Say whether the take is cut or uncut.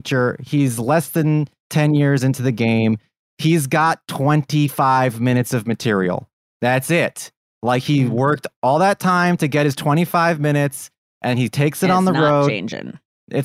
uncut